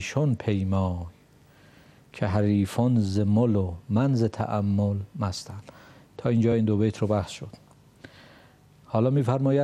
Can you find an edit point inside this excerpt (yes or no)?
no